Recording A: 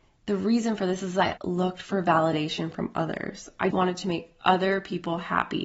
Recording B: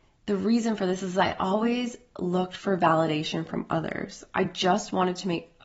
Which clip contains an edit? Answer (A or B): A